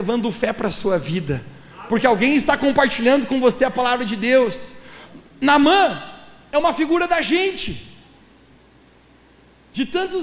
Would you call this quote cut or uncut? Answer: uncut